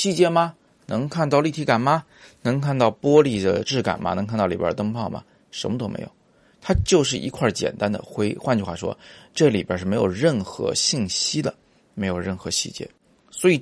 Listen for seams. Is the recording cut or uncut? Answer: uncut